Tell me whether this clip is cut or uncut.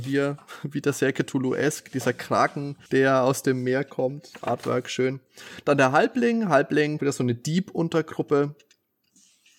cut